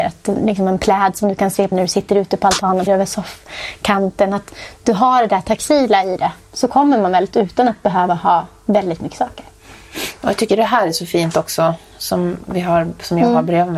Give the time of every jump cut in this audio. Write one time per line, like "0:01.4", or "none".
0:01.7
0:02.9
0:07.3